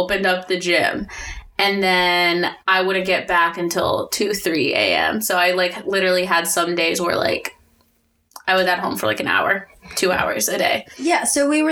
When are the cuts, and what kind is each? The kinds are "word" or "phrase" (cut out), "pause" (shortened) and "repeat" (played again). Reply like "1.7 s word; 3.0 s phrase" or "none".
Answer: 2.6 s pause